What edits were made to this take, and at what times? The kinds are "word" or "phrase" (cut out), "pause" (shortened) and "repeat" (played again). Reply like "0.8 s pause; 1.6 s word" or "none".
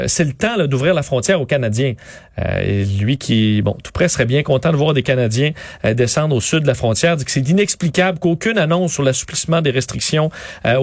none

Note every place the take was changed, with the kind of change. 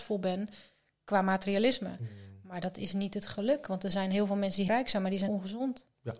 4.7 s word; 5.3 s word

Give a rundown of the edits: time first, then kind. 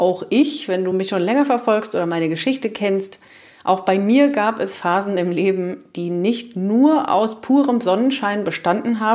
none

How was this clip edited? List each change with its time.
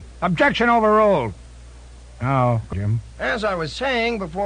2.7 s word

